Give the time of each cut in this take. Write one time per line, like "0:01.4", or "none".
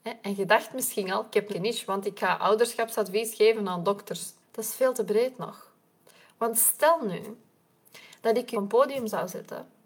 0:01.5
0:04.4
0:08.5